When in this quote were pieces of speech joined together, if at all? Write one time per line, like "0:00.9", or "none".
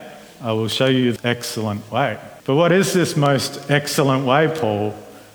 0:01.2
0:02.4